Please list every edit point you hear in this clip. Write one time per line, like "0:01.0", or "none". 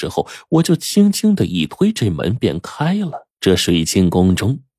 0:03.3